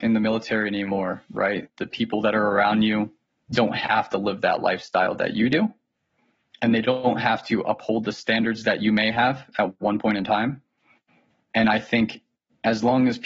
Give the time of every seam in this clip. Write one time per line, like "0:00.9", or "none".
none